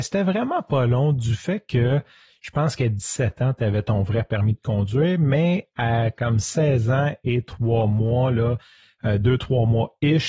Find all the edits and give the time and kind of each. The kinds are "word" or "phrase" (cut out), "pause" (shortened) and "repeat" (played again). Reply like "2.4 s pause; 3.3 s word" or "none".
none